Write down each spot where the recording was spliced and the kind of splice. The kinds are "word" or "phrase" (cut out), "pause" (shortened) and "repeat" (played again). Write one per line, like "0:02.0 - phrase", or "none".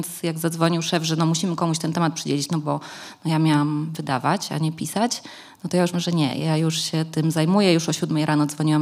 0:05.9 - word